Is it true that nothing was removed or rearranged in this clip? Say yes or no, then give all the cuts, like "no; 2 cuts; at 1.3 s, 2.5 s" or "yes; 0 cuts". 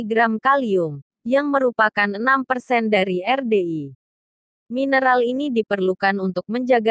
yes; 0 cuts